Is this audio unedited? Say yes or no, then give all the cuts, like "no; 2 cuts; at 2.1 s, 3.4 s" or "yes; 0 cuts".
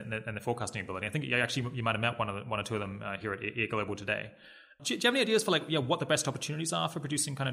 yes; 0 cuts